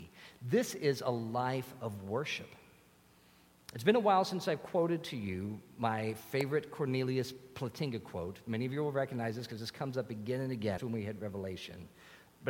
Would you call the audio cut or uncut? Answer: cut